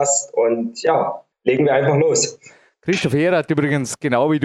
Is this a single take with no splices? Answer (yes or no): no